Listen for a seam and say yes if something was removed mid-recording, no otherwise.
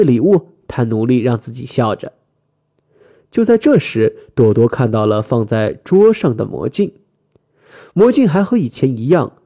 no